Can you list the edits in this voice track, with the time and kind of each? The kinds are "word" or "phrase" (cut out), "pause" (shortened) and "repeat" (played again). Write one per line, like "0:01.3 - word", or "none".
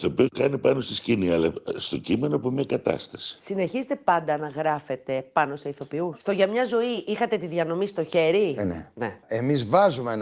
none